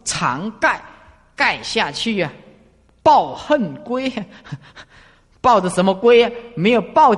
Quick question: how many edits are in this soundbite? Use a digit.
0